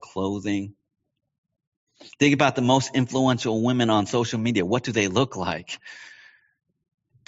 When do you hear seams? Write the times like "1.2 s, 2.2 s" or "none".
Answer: none